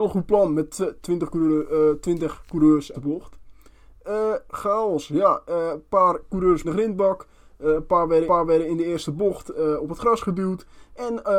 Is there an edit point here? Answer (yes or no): yes